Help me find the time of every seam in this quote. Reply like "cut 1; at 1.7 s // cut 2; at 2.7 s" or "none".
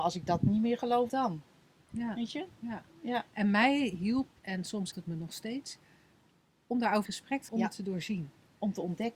cut 1; at 1.1 s // cut 2; at 4.3 s // cut 3; at 4.9 s // cut 4; at 7.1 s // cut 5; at 7.5 s